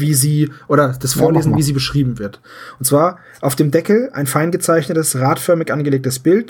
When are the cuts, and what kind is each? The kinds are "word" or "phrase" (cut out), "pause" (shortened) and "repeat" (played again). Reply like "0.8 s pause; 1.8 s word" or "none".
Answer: none